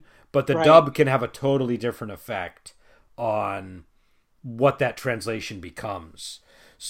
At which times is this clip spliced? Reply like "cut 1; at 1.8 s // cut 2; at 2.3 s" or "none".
none